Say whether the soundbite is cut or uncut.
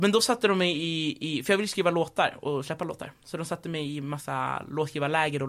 uncut